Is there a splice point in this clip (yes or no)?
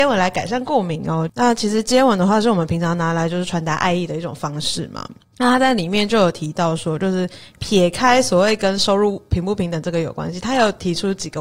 no